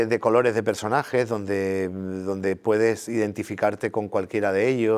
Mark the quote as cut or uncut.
uncut